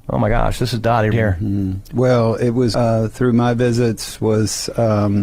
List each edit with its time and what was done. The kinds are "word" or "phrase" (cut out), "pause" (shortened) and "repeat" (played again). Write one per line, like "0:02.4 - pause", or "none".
0:01.1 - word
0:02.7 - word